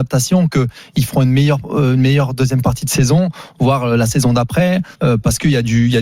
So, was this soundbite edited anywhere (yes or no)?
yes